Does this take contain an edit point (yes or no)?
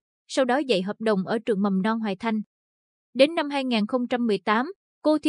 no